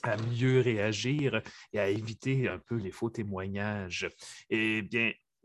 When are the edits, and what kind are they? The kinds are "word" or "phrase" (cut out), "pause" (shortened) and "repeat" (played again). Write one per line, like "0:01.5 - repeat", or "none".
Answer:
none